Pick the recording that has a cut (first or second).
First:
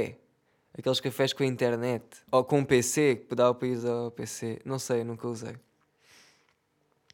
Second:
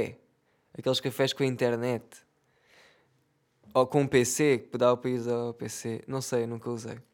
first